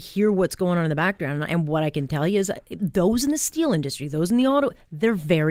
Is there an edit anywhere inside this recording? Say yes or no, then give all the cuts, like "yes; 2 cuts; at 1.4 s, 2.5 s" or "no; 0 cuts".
no; 0 cuts